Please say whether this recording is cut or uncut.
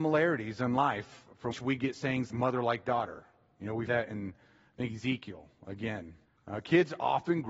cut